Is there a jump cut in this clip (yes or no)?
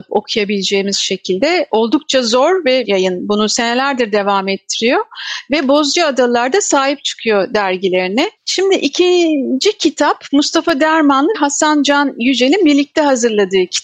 yes